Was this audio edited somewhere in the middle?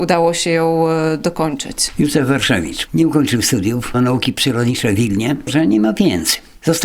yes; 2 cuts; at 3.9 s, 5.5 s

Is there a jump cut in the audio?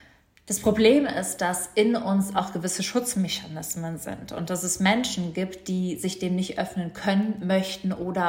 no; 0 cuts

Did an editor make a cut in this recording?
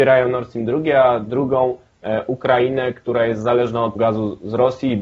yes; 1 cut; at 4.0 s

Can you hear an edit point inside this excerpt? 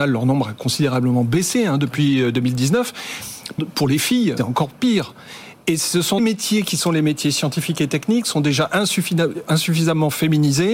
yes; 3 cuts; at 3.6 s, 4.4 s, 6.2 s

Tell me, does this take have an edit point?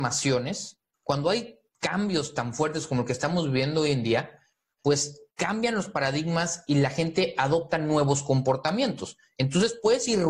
no; 0 cuts

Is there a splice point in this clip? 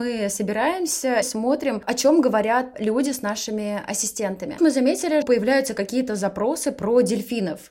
yes; 4 cuts; at 1.2 s, 2.7 s, 4.6 s, 5.2 s

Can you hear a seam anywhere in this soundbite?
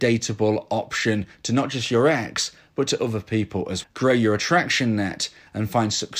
yes; 1 cut; at 3.8 s

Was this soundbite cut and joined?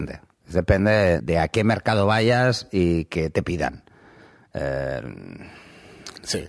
yes; 1 cut; at 1.2 s

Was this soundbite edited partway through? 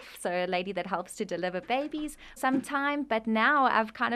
yes; 1 cut; at 2.4 s

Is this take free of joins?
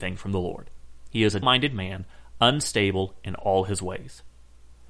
no; 1 cut; at 1.4 s

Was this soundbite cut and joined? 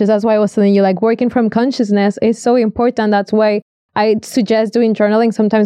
no; 0 cuts

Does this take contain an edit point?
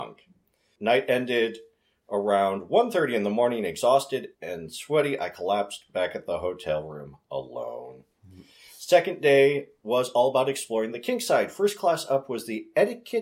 yes; 1 cut; at 4.3 s

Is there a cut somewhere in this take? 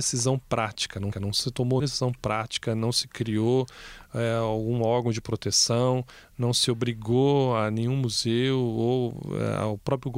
yes; 2 cuts; at 1.1 s, 1.8 s

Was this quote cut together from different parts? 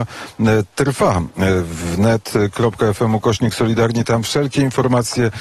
no; 0 cuts

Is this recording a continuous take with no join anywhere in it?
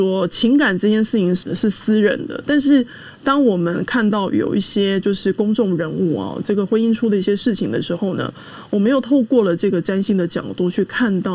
no; 1 cut; at 1.4 s

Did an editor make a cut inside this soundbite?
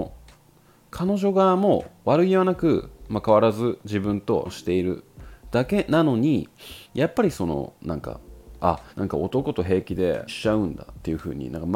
yes; 4 cuts; at 4.5 s, 6.8 s, 8.9 s, 10.3 s

